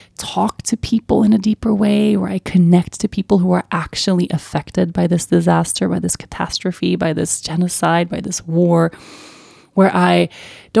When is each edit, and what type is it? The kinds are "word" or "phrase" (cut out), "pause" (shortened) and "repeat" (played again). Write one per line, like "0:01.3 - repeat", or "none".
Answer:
none